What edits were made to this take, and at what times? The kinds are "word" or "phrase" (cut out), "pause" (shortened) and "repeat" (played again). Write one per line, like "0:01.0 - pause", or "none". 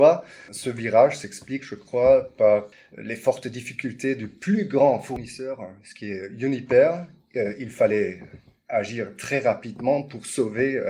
none